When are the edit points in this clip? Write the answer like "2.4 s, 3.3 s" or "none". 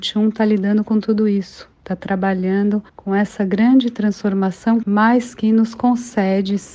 1.7 s, 2.9 s, 4.8 s